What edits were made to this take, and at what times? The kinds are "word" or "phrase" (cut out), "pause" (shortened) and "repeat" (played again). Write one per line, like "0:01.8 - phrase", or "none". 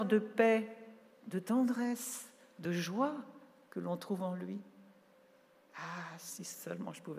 none